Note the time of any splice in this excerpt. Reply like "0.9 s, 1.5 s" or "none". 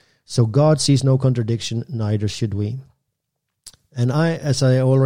none